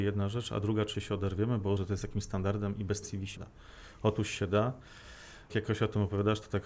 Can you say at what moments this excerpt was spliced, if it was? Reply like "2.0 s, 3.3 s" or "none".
0.9 s, 1.8 s, 3.0 s, 3.4 s, 5.5 s